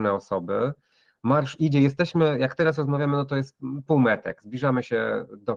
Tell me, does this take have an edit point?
no; 0 cuts

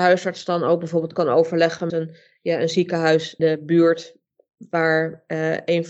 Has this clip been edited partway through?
yes; 2 cuts; at 1.9 s, 3.4 s

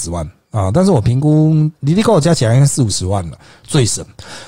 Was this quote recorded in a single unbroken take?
yes; 0 cuts

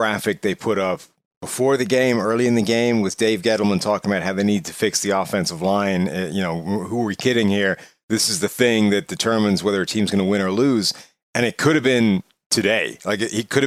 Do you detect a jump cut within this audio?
no; 0 cuts

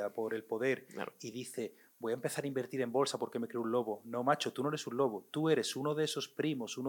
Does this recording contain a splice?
no; 0 cuts

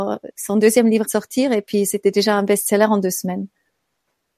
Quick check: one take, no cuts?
no; 1 cut; at 1.0 s

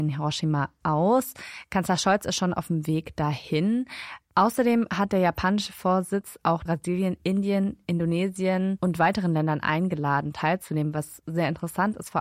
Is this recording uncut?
no; 1 cut; at 6.7 s

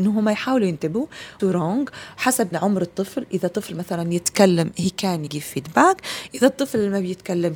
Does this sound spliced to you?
yes; 3 cuts; at 1.4 s, 2.5 s, 5.3 s

